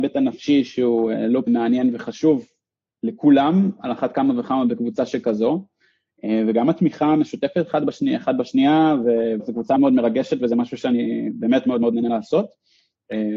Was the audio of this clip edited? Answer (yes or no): yes